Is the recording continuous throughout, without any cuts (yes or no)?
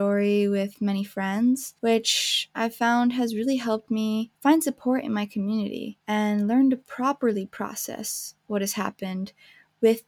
no